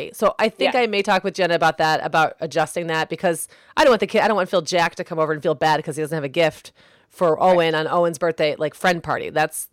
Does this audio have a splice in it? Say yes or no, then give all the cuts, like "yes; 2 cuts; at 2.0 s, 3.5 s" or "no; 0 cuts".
no; 0 cuts